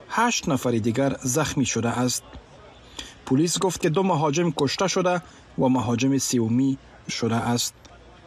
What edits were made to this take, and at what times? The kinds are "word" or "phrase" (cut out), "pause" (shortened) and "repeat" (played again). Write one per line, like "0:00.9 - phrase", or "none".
0:03.8 - word
0:07.1 - word